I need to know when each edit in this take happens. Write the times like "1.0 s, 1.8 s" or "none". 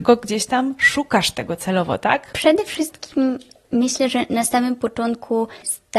none